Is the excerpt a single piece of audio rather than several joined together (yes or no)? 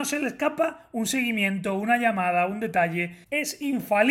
yes